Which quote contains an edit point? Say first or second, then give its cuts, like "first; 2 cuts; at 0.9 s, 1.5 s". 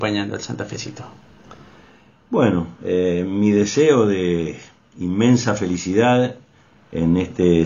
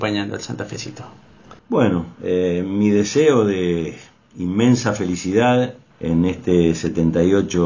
second; 2 cuts; at 1.6 s, 5.9 s